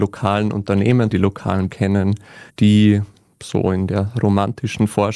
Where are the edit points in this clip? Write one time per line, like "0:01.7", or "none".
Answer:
0:01.1
0:01.7
0:02.5

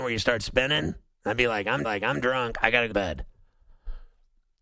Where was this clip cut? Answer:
0:01.8
0:02.9

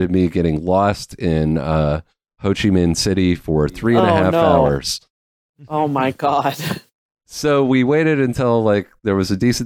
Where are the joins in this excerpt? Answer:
none

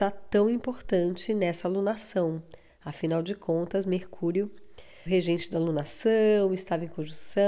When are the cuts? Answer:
0:05.1

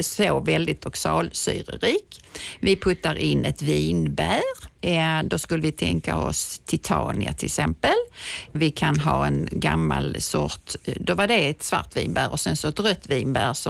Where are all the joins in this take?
none

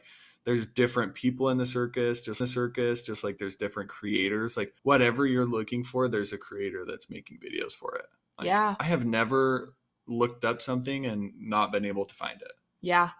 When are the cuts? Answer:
0:02.4
0:04.8

